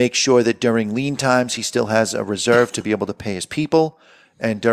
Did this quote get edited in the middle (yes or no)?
no